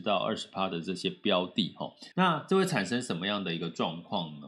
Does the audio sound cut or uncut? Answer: cut